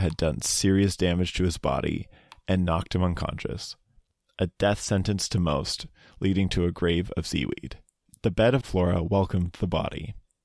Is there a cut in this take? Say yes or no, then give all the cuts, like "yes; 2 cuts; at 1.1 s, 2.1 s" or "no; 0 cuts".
yes; 1 cut; at 8.6 s